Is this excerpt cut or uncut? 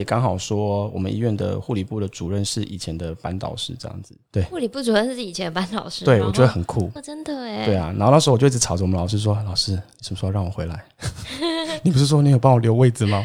cut